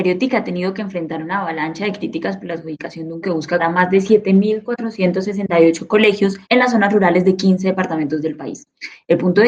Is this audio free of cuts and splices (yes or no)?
no